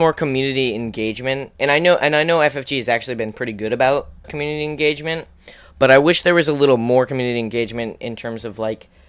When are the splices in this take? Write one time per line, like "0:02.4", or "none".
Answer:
0:04.2